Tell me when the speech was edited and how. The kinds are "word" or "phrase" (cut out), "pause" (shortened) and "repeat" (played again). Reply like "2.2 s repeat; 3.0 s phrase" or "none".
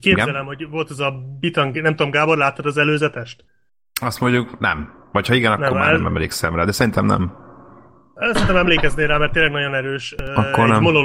none